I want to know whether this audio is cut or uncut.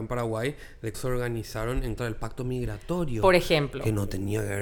cut